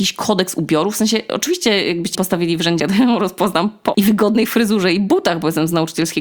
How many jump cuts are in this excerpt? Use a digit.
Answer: 3